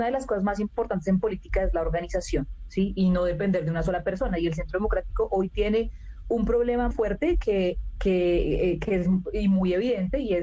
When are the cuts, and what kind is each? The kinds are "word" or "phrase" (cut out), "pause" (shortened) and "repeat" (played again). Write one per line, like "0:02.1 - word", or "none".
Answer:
0:06.9 - word